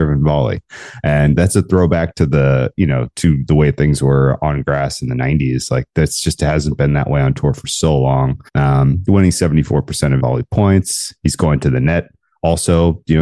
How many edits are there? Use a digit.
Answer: 2